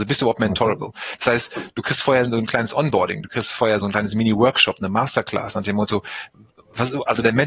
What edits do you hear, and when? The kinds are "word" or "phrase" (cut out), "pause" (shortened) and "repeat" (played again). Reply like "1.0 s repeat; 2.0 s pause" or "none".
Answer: 3.8 s word